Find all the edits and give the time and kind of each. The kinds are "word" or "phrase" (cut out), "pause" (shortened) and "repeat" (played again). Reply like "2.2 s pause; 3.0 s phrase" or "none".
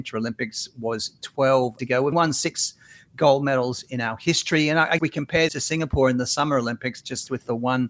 1.8 s word; 2.1 s word; 5.0 s word; 5.5 s word

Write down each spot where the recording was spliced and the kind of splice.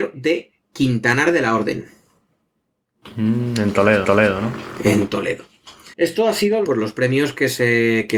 4.0 s repeat; 5.9 s pause; 6.6 s phrase

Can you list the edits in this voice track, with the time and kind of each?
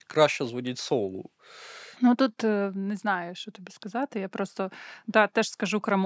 1.9 s pause

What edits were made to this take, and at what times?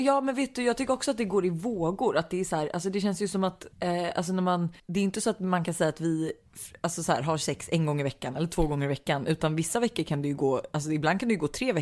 3.7 s pause; 4.8 s pause

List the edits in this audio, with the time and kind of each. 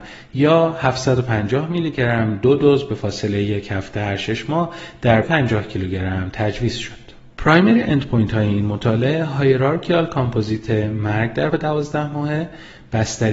5.2 s phrase; 7.3 s pause; 11.5 s word

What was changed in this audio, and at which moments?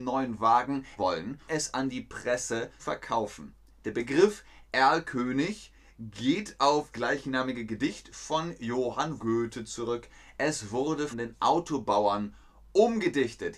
1.0 s word; 1.5 s word; 2.8 s word; 6.9 s word; 9.2 s word; 11.1 s word

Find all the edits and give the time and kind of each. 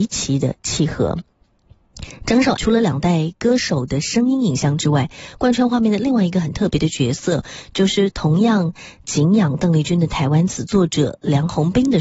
2.6 s word

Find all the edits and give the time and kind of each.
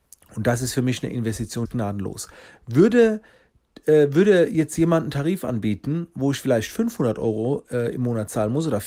1.7 s phrase

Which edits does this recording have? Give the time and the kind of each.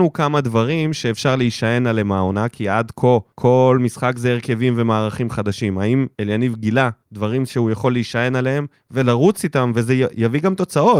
3.3 s pause; 6.1 s pause; 7.0 s pause; 8.7 s pause

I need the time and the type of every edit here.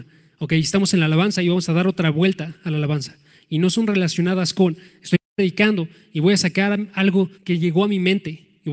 7.3 s pause

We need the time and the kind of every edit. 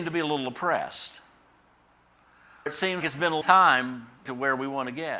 2.7 s word; 3.0 s word; 3.4 s word; 4.3 s word

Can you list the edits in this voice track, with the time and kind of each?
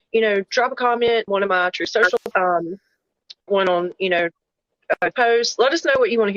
1.3 s word; 2.3 s word; 3.5 s word; 5.1 s word

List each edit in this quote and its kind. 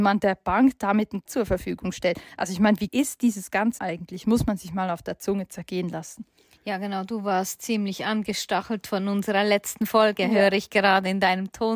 1.3 s word; 2.9 s word; 3.8 s word

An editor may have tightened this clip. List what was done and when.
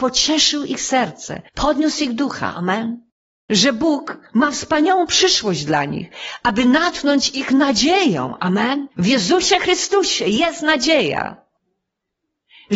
1.5 s pause; 3.2 s pause; 8.9 s pause

